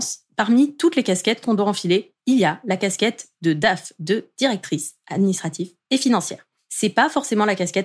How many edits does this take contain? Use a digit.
0